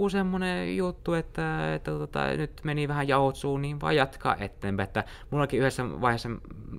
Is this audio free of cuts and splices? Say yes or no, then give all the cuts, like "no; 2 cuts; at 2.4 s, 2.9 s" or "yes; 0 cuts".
yes; 0 cuts